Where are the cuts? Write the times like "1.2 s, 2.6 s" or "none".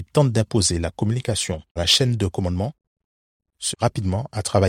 1.8 s, 3.7 s